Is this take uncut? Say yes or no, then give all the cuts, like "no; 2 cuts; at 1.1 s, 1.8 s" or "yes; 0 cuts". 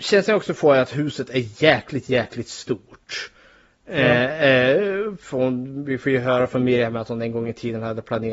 yes; 0 cuts